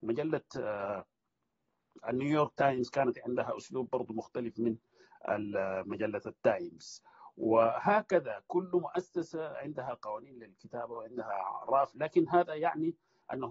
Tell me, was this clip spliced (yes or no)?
no